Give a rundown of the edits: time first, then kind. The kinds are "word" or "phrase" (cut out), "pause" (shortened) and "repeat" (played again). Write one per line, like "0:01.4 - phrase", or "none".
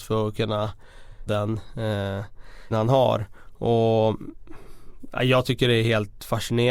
0:01.3 - phrase
0:02.7 - word